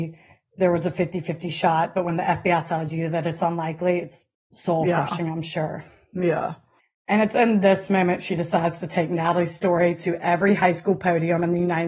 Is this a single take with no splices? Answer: yes; 0 cuts

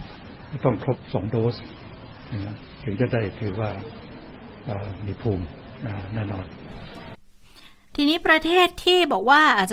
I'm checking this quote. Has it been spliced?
no; 0 cuts

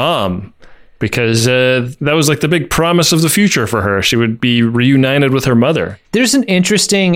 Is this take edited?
yes; 1 cut; at 6.0 s

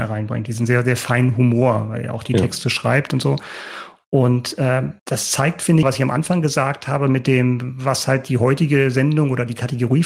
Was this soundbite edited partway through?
yes; 2 cuts; at 5.0 s, 5.8 s

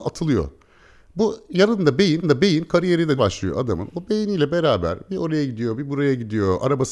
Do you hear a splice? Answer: yes; 2 cuts; at 2.2 s, 3.2 s

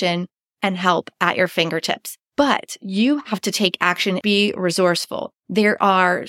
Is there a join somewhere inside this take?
yes; 3 cuts; at 2.2 s, 4.2 s, 5.4 s

